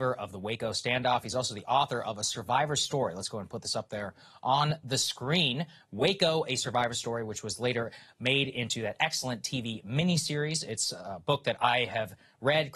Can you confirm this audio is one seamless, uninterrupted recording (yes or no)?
yes